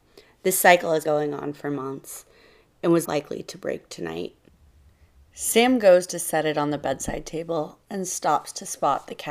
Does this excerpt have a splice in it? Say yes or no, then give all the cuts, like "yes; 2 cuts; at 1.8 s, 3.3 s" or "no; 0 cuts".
yes; 2 cuts; at 1.0 s, 3.0 s